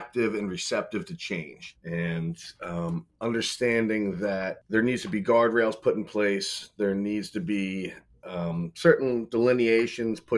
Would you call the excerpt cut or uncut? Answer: uncut